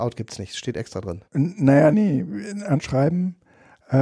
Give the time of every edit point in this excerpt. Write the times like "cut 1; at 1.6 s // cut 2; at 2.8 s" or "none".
cut 1; at 1.3 s // cut 2; at 1.9 s // cut 3; at 2.8 s